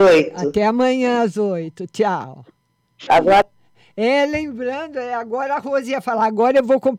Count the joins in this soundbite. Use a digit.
0